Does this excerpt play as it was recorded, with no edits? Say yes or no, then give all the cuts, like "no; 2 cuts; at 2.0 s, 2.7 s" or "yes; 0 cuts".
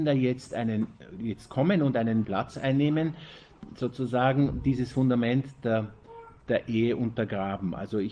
no; 1 cut; at 2.2 s